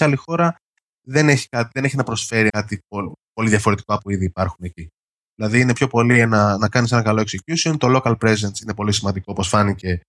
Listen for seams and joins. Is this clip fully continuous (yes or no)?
no